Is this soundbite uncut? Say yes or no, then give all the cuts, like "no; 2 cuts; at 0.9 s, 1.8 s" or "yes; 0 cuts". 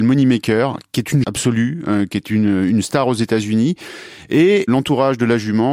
no; 1 cut; at 1.2 s